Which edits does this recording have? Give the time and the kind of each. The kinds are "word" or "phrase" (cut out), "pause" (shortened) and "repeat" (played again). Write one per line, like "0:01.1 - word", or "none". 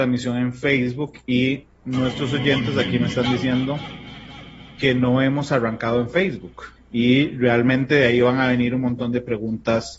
0:06.7 - pause